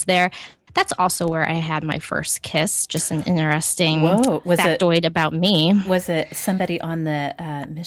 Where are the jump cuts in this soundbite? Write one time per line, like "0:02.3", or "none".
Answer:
none